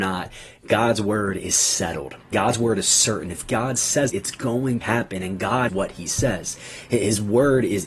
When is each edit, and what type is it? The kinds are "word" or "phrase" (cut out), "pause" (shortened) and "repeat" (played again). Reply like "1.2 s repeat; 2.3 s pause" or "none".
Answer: 2.3 s word; 4.1 s word; 4.8 s word; 5.7 s word